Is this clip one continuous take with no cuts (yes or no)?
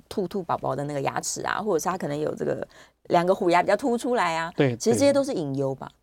yes